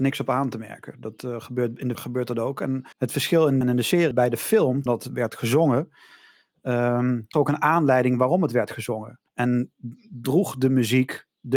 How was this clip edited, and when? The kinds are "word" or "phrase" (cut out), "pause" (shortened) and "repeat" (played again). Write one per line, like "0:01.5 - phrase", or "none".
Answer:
0:01.9 - word
0:02.9 - pause
0:03.6 - phrase
0:04.1 - phrase
0:04.9 - word
0:07.3 - word
0:09.3 - pause